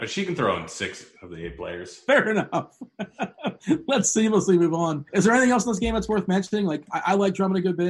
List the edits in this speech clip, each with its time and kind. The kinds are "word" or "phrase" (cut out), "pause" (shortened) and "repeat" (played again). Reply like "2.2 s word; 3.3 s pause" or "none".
5.1 s pause